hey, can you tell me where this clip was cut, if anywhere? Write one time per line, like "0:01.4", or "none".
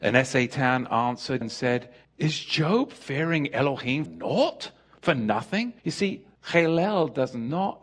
0:01.4
0:02.0
0:04.1
0:05.8
0:06.4